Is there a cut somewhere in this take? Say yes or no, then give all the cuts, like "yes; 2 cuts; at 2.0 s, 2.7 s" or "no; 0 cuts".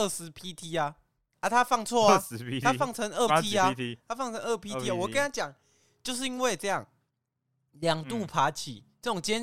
yes; 1 cut; at 3.3 s